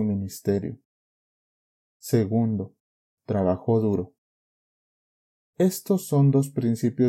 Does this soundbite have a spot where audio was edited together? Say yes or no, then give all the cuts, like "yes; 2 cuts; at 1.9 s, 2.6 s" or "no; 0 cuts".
no; 0 cuts